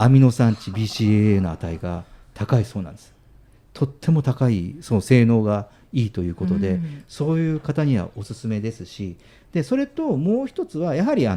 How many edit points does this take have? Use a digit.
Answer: 0